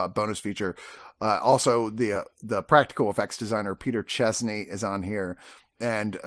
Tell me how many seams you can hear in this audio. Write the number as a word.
zero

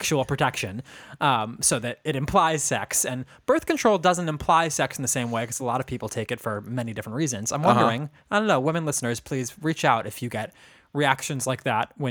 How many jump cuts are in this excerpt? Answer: zero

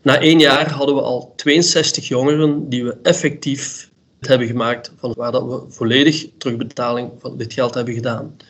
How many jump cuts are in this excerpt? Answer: two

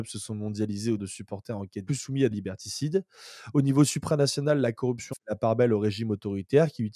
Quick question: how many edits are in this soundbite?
four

